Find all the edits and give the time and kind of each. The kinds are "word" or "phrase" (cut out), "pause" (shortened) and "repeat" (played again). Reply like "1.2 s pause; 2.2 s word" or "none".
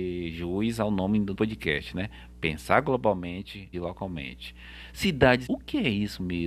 1.3 s word; 3.7 s word; 5.5 s word